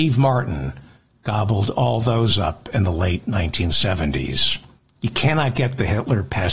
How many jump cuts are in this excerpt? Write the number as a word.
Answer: zero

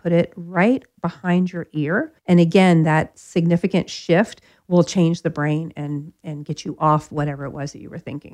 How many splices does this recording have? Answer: one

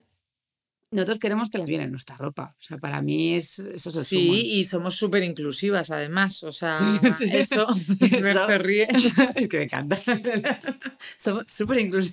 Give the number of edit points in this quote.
one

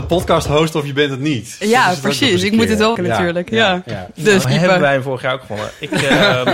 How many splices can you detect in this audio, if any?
two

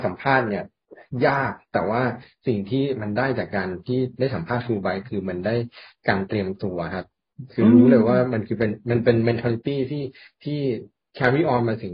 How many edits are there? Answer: zero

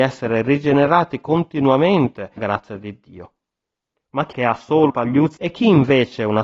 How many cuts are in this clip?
four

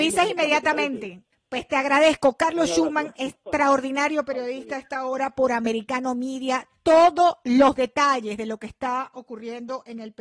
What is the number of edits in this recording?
one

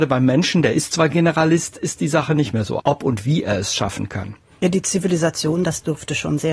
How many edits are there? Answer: one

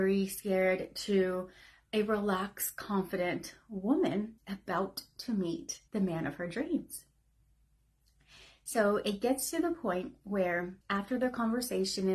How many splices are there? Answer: three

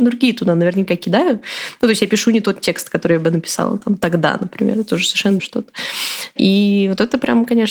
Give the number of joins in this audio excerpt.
one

